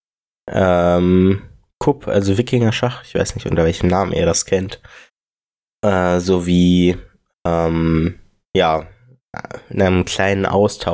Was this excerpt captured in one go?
yes; 0 cuts

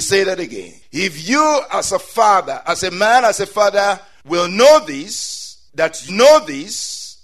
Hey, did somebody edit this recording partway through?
yes; 1 cut; at 6.1 s

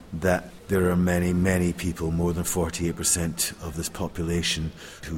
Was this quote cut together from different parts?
no; 0 cuts

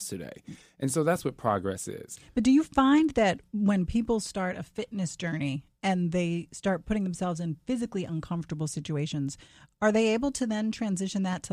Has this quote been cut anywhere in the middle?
no; 0 cuts

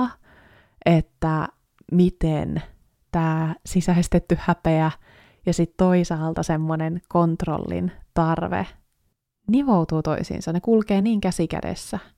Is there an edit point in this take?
no; 0 cuts

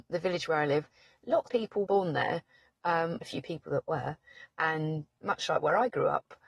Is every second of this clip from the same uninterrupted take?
no; 4 cuts; at 1.5 s, 1.9 s, 3.2 s, 5.2 s

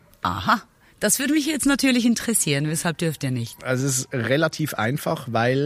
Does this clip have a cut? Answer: no; 0 cuts

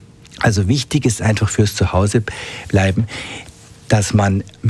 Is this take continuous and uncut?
yes; 0 cuts

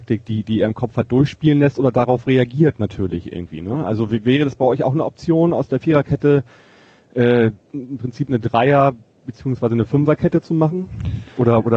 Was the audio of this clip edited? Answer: no; 0 cuts

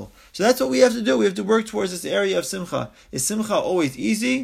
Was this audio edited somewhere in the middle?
no; 0 cuts

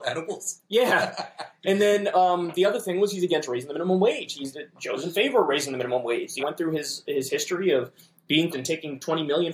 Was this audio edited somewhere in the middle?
yes; 2 cuts; at 6.4 s, 8.5 s

